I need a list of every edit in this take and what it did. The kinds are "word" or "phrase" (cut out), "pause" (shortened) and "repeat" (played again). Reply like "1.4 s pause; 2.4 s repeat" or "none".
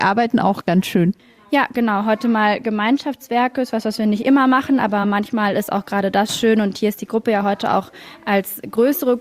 none